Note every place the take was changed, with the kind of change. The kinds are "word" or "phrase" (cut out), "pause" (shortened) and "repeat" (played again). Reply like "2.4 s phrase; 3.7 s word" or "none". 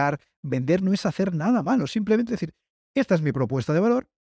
none